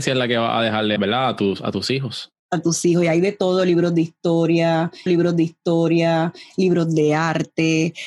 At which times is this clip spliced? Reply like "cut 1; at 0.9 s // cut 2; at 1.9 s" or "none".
cut 1; at 1.0 s // cut 2; at 2.4 s // cut 3; at 5.1 s